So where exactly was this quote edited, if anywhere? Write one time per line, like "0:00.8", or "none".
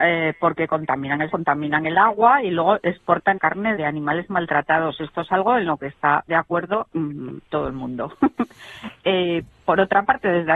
0:01.3
0:03.4
0:03.8
0:06.3
0:07.4